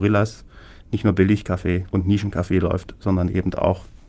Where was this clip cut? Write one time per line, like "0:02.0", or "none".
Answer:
0:01.9